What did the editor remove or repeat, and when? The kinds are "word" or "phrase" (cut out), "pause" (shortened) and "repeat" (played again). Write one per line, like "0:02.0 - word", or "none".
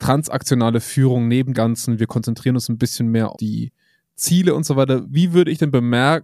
0:01.5 - word
0:03.3 - word
0:05.0 - word